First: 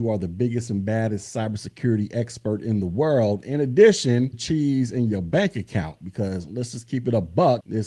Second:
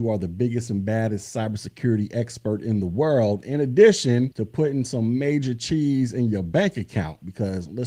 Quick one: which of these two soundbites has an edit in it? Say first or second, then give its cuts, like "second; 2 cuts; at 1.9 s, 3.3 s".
first; 1 cut; at 4.3 s